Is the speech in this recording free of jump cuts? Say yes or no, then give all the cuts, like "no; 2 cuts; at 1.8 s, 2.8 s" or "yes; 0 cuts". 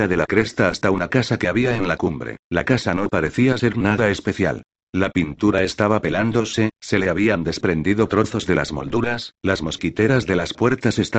no; 1 cut; at 2.4 s